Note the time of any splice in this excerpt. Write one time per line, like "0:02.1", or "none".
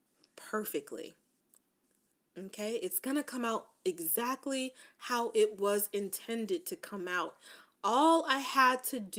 none